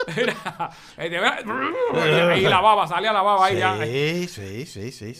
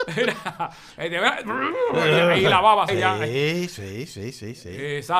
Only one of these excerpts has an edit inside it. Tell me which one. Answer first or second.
second